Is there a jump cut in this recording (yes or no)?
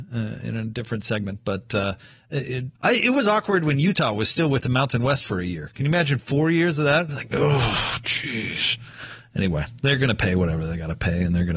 yes